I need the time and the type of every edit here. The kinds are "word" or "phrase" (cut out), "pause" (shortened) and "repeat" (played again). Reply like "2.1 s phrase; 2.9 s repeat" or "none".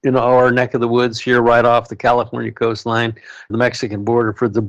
3.5 s phrase